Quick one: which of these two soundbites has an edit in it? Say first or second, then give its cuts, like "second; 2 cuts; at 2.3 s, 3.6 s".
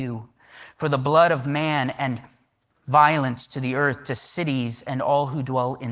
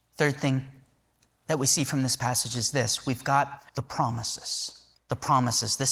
second; 2 cuts; at 3.7 s, 4.9 s